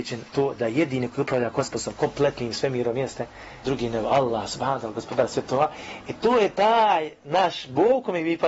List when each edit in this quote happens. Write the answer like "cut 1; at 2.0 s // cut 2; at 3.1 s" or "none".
cut 1; at 3.6 s